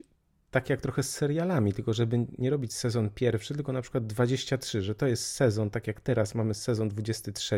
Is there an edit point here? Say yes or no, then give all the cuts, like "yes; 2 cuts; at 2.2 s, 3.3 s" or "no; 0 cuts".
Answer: no; 0 cuts